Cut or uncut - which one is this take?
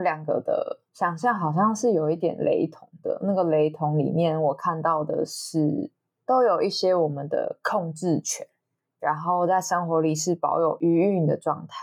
uncut